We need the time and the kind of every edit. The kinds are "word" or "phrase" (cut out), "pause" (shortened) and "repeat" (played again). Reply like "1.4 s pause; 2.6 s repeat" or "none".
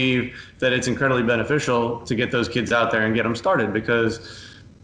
none